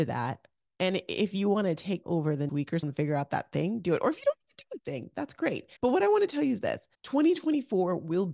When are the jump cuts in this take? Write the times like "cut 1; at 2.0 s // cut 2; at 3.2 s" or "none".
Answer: cut 1; at 2.0 s // cut 2; at 2.5 s // cut 3; at 2.8 s // cut 4; at 5.8 s // cut 5; at 6.9 s